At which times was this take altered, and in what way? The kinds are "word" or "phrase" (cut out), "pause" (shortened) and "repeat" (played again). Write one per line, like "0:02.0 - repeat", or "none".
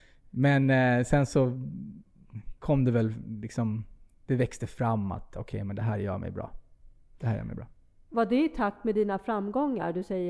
none